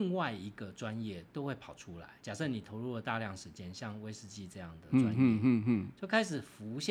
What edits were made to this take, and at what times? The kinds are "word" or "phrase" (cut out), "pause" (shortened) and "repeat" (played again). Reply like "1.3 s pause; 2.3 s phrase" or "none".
2.2 s pause